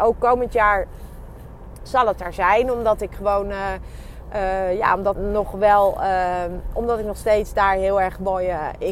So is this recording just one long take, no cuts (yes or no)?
no